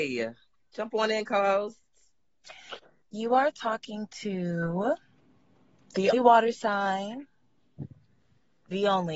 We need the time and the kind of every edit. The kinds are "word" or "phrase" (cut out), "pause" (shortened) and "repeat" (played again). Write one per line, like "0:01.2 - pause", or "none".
0:06.1 - word